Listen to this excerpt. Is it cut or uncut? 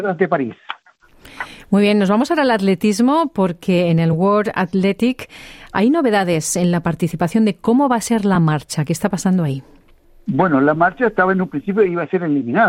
uncut